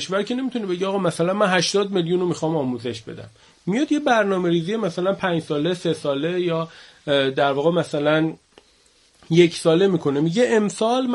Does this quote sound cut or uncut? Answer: uncut